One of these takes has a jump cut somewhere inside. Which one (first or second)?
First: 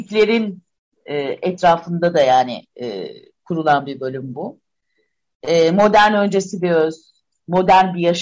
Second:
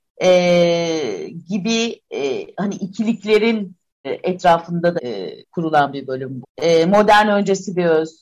second